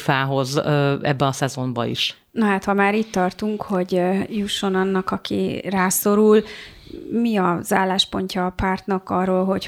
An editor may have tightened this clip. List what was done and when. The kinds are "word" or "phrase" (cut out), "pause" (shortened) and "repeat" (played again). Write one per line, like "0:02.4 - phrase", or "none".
none

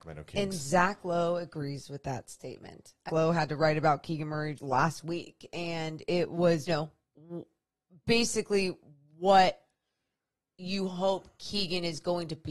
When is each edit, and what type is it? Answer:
0:03.1 - phrase
0:04.6 - word
0:06.7 - phrase

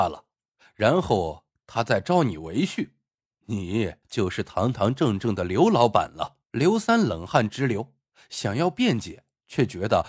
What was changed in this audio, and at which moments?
0:04.0 - pause
0:06.4 - pause

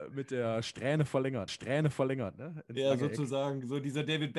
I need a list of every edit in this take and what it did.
0:01.5 - repeat

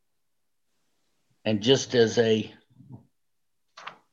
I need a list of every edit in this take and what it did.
none

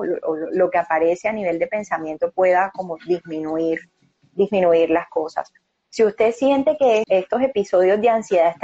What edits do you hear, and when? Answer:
0:07.0 - word

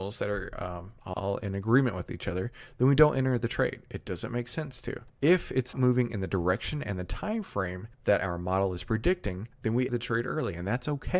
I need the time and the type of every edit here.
0:01.1 - word
0:05.1 - pause
0:05.7 - word
0:07.9 - pause
0:09.5 - pause
0:09.9 - word

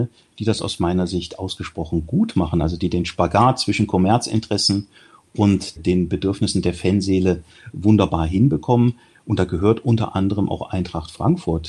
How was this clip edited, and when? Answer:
none

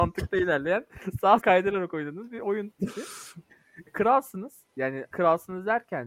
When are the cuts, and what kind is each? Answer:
0:01.4 - word
0:03.9 - word
0:05.1 - word

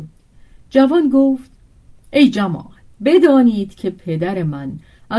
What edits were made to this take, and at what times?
0:02.9 - pause

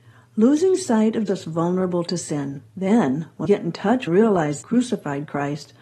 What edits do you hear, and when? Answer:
0:01.3 - phrase
0:02.7 - pause
0:03.4 - word
0:04.1 - phrase
0:04.6 - phrase

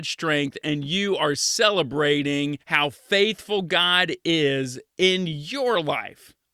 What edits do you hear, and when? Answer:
0:02.6 - pause

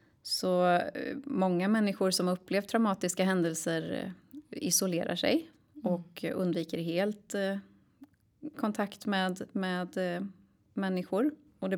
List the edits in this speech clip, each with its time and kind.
none

